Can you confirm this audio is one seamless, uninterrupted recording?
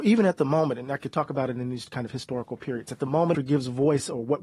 no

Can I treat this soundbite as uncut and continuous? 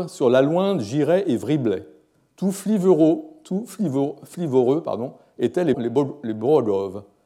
no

